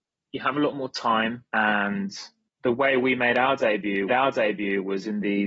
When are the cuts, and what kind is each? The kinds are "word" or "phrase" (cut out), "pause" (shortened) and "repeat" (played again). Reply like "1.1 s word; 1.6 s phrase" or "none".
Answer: 1.5 s pause; 4.1 s repeat